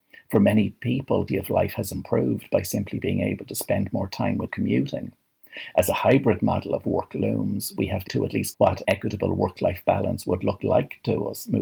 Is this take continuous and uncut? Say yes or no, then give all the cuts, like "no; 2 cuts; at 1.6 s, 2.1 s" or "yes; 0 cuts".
no; 5 cuts; at 1.3 s, 4.5 s, 8.1 s, 8.5 s, 8.8 s